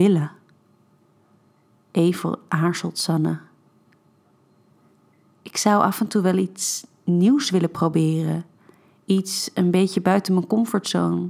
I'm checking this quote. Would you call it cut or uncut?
uncut